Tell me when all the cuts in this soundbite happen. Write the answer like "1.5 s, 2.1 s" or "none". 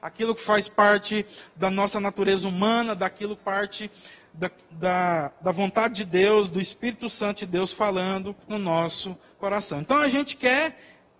3.4 s, 8.4 s